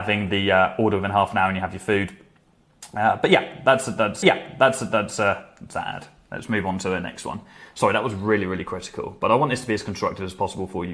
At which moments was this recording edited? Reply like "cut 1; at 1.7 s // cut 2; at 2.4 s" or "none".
cut 1; at 4.2 s